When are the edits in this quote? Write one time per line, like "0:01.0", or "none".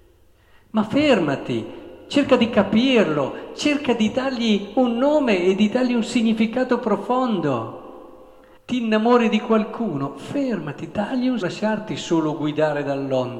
0:08.6
0:11.4